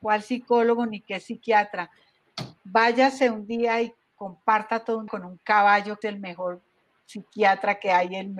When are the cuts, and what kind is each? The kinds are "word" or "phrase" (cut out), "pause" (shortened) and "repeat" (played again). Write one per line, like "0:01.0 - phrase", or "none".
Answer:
0:05.1 - word
0:06.0 - word